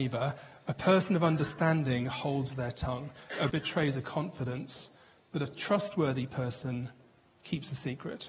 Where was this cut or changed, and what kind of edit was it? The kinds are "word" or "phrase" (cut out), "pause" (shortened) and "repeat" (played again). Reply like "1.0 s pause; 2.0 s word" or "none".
3.5 s word

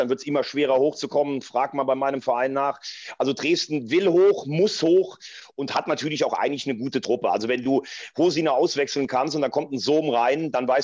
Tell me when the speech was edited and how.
none

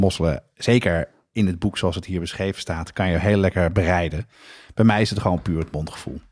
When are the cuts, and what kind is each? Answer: none

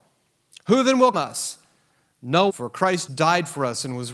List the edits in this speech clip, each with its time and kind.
1.1 s word; 2.5 s word; 3.1 s word

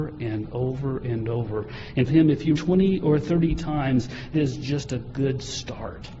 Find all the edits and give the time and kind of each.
2.1 s phrase; 2.6 s phrase; 4.3 s word

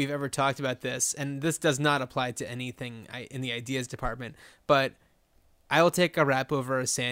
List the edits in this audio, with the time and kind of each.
none

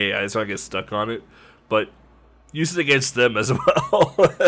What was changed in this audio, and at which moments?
none

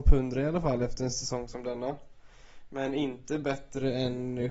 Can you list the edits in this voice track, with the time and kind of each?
none

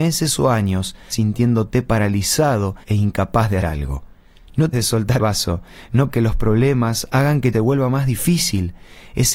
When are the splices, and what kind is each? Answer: 1.1 s word; 2.8 s pause; 3.6 s word; 4.7 s word; 5.2 s word; 6.1 s word; 7.5 s phrase

